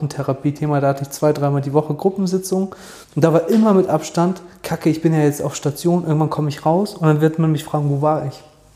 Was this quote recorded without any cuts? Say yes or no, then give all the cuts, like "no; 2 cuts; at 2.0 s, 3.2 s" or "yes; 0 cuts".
no; 1 cut; at 3.0 s